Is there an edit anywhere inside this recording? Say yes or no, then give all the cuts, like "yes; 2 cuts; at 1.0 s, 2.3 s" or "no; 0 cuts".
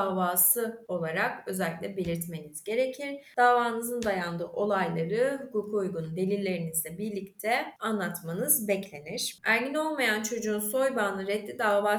no; 0 cuts